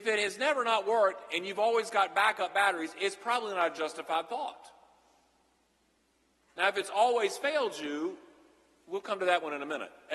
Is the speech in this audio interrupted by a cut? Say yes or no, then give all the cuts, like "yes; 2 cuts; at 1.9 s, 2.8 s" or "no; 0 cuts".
no; 0 cuts